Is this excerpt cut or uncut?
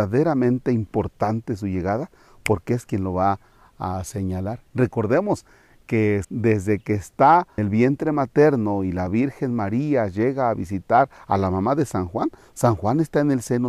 cut